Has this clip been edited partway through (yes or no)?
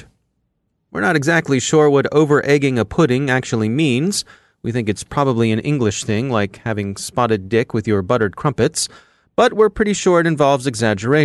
no